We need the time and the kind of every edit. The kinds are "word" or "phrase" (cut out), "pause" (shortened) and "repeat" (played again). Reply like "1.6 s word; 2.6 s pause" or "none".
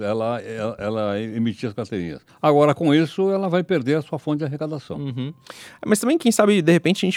2.3 s pause